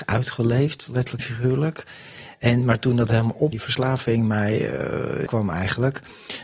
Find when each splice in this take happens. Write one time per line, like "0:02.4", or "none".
0:01.2
0:03.5
0:05.3